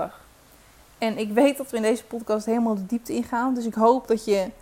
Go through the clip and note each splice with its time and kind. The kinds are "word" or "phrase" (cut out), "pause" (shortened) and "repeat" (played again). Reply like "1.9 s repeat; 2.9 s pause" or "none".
none